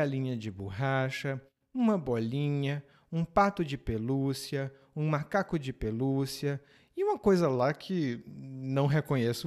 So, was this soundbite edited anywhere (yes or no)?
no